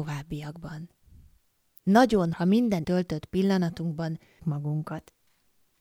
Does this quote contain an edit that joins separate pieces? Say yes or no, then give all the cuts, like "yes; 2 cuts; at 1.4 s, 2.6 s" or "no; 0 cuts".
yes; 3 cuts; at 2.3 s, 2.8 s, 4.4 s